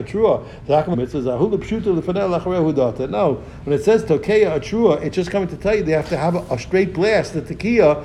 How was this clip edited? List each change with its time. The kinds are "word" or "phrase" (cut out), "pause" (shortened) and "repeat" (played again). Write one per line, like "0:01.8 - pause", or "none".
0:00.9 - phrase